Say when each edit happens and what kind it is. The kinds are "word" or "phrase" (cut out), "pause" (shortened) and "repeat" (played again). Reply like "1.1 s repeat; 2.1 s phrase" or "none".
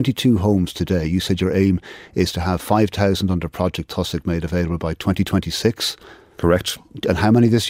none